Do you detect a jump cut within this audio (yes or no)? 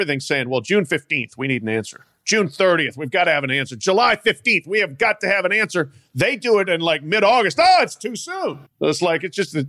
yes